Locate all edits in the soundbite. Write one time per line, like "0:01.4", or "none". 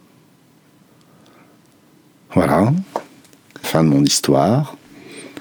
0:03.6